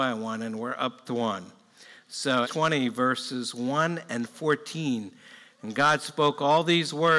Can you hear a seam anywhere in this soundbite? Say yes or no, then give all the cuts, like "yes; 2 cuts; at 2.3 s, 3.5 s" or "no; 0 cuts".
yes; 2 cuts; at 1.1 s, 2.4 s